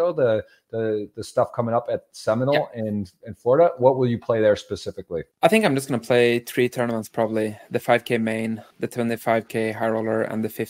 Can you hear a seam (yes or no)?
yes